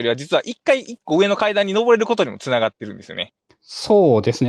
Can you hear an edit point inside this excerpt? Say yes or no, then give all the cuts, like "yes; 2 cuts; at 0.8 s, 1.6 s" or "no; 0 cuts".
no; 0 cuts